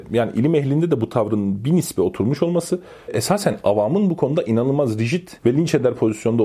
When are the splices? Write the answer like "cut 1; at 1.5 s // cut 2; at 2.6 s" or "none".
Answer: cut 1; at 3.1 s // cut 2; at 5.4 s